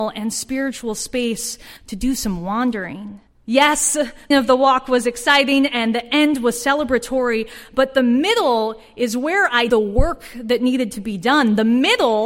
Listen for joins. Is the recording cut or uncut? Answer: cut